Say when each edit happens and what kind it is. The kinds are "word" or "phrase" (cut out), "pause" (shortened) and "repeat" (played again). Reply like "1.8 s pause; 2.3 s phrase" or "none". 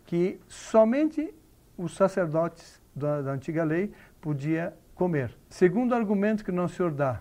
5.4 s pause